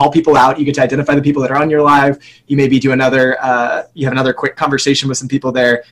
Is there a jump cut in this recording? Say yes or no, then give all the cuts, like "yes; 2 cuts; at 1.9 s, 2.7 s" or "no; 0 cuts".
no; 0 cuts